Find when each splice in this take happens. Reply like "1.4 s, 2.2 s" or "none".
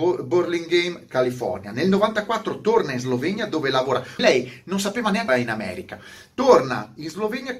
4.2 s, 5.3 s